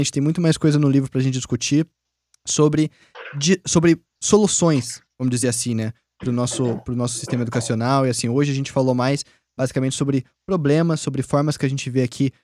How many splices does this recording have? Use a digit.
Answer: 0